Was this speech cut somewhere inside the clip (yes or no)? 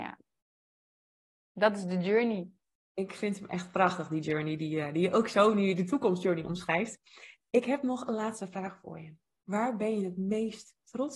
no